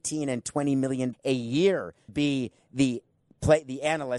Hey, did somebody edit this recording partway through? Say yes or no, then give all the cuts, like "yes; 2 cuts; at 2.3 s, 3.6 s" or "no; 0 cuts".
yes; 2 cuts; at 1.1 s, 2.1 s